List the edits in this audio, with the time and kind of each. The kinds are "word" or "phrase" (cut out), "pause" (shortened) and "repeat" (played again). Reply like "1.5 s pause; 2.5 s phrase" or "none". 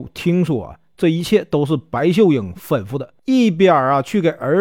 3.2 s pause